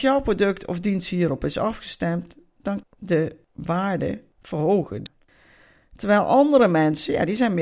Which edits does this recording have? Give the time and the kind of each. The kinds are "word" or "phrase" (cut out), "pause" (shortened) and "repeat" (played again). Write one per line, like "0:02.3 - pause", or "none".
0:02.8 - phrase